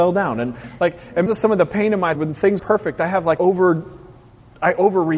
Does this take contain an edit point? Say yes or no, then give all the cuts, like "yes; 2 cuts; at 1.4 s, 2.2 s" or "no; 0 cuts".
yes; 4 cuts; at 1.3 s, 2.2 s, 2.6 s, 3.4 s